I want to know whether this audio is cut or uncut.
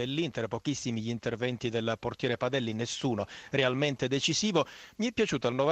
uncut